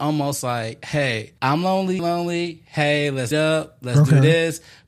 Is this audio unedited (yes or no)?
no